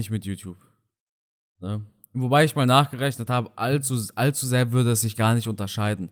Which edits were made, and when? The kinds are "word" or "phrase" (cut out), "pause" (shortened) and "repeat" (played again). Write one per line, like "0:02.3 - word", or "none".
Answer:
none